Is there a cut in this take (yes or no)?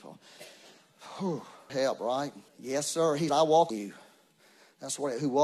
yes